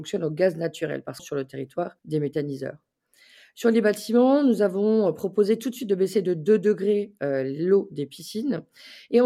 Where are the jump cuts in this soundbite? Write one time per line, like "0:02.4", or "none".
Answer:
0:01.2
0:02.0